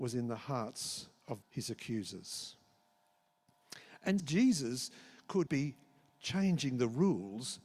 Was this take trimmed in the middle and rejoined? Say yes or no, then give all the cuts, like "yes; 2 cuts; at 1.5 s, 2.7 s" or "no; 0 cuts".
yes; 3 cuts; at 1.4 s, 4.2 s, 5.5 s